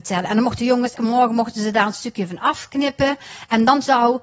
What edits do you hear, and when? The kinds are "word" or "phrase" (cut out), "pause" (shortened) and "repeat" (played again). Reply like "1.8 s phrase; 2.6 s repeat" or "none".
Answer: 1.0 s word